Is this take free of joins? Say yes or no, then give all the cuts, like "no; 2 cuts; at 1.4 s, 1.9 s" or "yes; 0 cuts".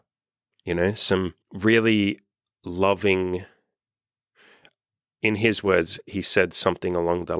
no; 1 cut; at 1.4 s